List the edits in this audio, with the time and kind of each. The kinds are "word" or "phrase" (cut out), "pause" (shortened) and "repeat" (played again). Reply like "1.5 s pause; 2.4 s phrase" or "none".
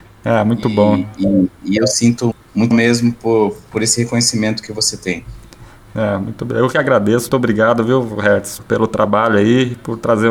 2.3 s word; 2.7 s word; 7.3 s word; 8.6 s word